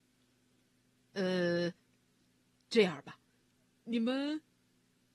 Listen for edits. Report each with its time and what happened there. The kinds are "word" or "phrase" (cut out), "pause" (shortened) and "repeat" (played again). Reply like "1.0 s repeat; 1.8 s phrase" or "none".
none